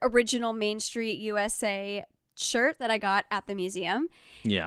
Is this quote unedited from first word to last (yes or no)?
yes